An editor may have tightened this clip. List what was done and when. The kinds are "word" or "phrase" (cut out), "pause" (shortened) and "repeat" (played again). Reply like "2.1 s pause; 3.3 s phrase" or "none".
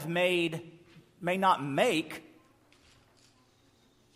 none